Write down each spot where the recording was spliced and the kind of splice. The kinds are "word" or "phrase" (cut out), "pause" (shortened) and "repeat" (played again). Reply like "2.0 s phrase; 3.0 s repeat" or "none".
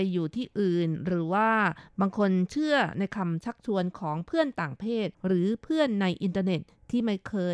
5.1 s pause